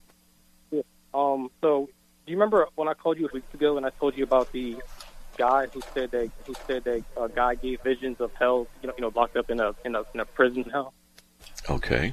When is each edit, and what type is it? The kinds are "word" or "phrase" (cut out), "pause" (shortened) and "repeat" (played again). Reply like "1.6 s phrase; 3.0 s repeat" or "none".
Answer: 1.5 s pause; 3.3 s word; 5.3 s word; 6.4 s repeat; 7.8 s word; 9.1 s word; 10.7 s word